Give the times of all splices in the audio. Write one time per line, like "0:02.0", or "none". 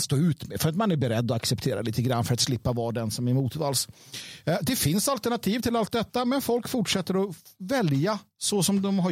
none